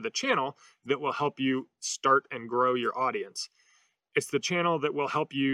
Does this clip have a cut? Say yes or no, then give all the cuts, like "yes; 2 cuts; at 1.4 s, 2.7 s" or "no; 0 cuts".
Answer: no; 0 cuts